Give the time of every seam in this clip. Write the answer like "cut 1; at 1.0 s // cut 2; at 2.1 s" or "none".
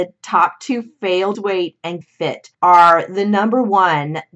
cut 1; at 1.3 s // cut 2; at 2.0 s // cut 3; at 2.5 s